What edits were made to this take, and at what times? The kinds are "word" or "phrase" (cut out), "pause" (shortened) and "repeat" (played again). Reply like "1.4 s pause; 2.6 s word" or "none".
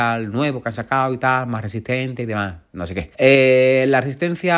3.1 s pause